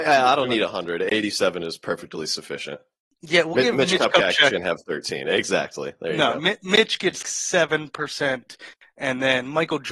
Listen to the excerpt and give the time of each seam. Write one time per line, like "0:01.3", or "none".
0:07.2